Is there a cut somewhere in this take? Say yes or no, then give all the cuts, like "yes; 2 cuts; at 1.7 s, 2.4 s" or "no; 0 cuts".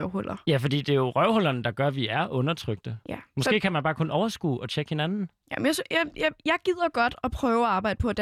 no; 0 cuts